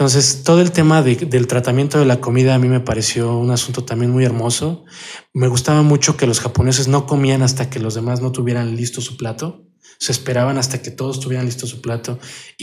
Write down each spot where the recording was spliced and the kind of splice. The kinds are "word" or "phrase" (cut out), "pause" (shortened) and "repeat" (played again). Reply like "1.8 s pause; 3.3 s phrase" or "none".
none

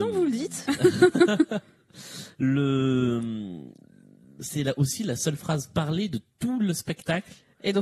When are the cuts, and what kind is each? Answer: none

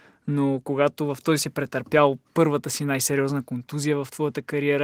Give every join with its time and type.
1.4 s word; 2.3 s word

